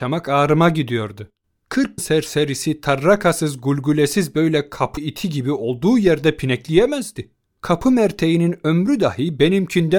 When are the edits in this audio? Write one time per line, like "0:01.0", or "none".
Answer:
0:02.0
0:05.0